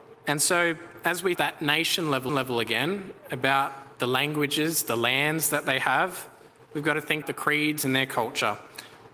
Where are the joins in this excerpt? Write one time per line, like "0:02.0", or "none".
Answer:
0:01.3
0:02.3
0:07.2